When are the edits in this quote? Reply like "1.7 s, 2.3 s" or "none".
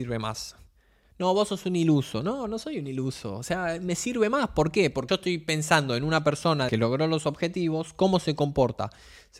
5.1 s, 6.7 s